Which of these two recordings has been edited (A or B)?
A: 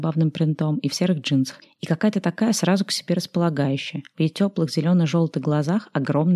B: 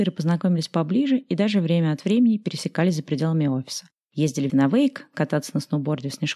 B